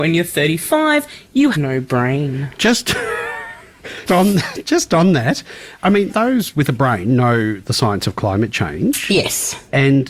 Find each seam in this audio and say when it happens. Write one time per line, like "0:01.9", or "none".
0:01.5
0:04.1
0:05.8
0:06.1